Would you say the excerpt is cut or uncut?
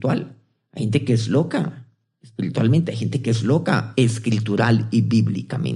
uncut